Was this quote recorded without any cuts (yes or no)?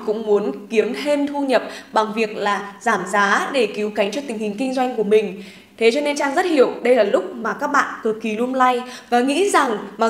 yes